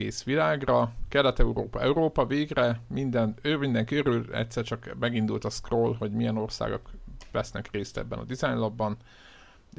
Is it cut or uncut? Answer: uncut